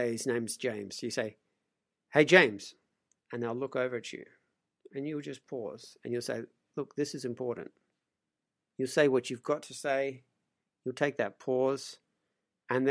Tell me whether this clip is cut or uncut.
uncut